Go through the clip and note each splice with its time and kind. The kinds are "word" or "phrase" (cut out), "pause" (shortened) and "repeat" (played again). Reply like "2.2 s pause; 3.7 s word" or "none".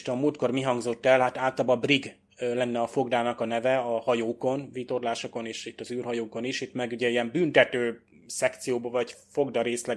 none